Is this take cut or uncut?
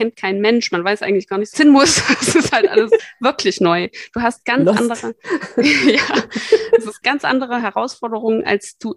cut